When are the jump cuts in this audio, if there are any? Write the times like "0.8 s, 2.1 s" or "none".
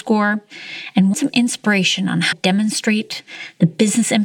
1.1 s, 2.3 s